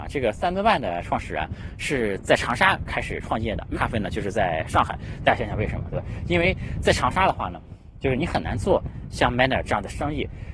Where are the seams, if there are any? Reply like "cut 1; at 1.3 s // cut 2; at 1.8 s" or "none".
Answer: cut 1; at 3.7 s

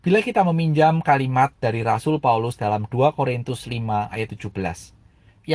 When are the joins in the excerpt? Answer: none

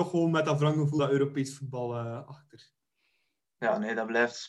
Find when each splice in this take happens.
cut 1; at 1.0 s

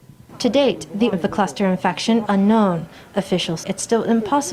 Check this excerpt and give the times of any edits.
cut 1; at 1.1 s // cut 2; at 2.3 s // cut 3; at 3.6 s

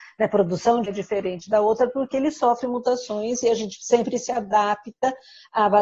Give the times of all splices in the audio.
none

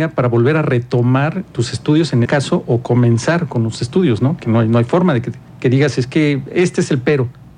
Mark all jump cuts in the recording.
cut 1; at 2.3 s // cut 2; at 5.5 s

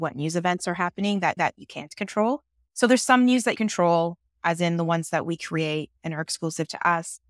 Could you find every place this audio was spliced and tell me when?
cut 1; at 1.4 s // cut 2; at 3.5 s // cut 3; at 6.0 s

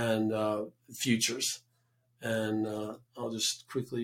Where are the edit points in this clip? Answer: none

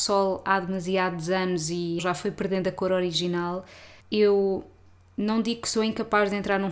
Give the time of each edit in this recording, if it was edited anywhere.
cut 1; at 2.0 s // cut 2; at 4.0 s

